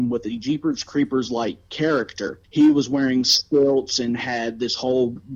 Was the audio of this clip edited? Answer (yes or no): no